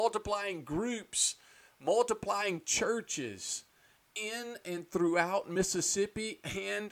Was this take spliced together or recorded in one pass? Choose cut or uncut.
uncut